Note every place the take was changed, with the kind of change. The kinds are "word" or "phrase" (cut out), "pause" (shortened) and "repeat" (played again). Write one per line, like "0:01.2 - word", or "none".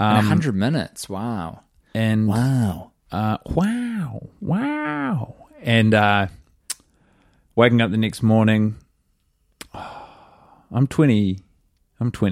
none

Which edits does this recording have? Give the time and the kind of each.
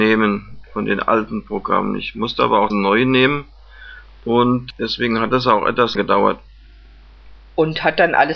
0:02.7 - word
0:05.9 - word

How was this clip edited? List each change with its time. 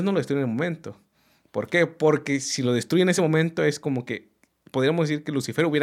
none

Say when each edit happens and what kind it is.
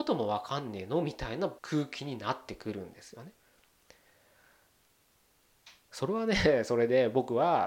0:01.6 - pause

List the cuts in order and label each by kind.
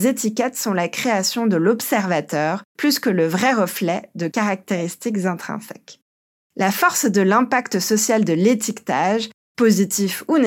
none

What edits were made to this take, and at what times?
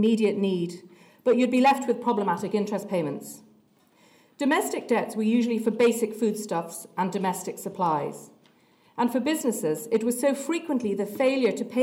none

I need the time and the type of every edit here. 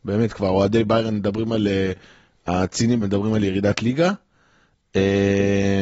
0:03.0 - word

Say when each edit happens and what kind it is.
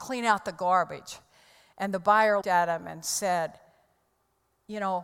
0:02.4 - word

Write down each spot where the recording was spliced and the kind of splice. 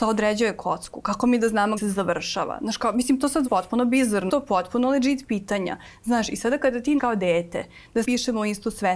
0:01.8 - phrase
0:03.5 - word
0:04.3 - phrase
0:07.0 - word
0:08.0 - word

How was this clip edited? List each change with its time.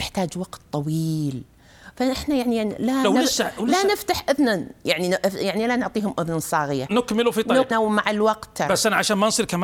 0:07.7 - phrase

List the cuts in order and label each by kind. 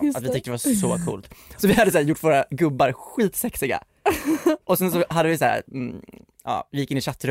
none

